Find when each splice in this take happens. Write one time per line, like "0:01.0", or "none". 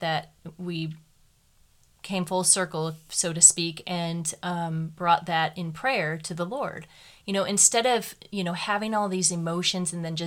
none

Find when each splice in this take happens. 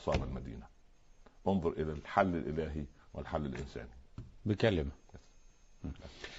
none

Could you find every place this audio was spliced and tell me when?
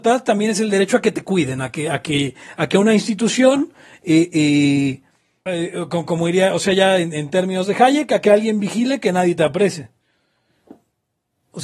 0:05.5

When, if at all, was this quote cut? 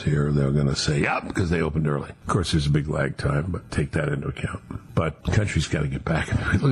0:03.7
0:05.2

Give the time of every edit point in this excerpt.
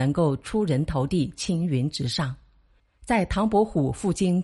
none

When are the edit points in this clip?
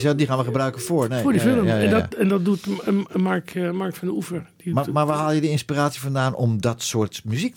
none

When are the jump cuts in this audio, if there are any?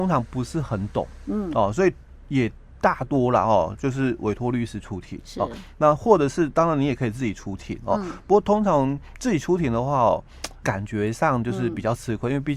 0:10.6

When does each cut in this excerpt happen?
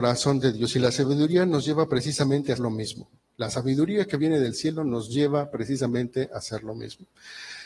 0:02.6

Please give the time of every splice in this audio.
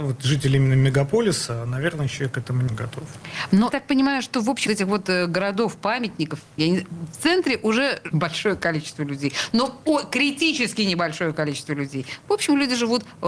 0:02.7
0:03.7
0:04.7
0:06.6
0:08.1

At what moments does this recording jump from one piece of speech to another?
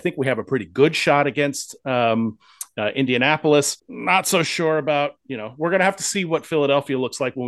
0:03.8

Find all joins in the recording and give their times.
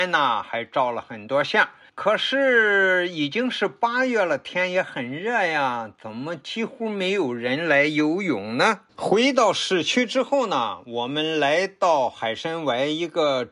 0:01.9
0:08.9

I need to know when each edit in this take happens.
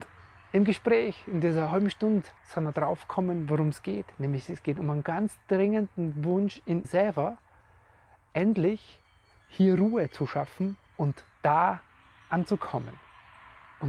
0:02.4
0:06.8
0:10.8

